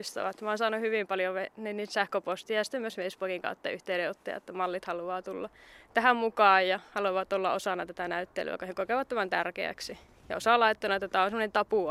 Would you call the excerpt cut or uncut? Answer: uncut